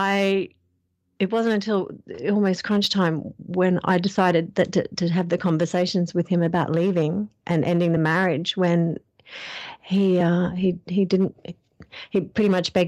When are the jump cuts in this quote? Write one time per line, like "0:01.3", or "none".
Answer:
none